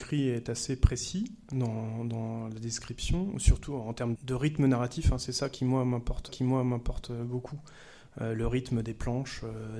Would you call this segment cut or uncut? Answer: cut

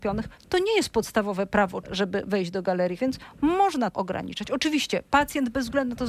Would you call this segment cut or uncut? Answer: cut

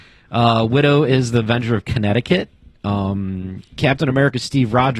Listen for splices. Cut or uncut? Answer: uncut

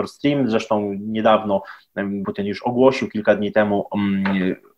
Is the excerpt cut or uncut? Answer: cut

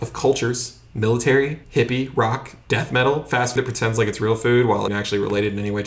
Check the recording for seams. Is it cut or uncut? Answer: cut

